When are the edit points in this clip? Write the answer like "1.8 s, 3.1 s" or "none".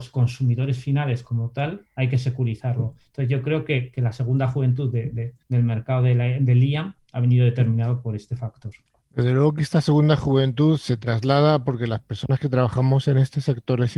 1.9 s, 5.4 s, 8.9 s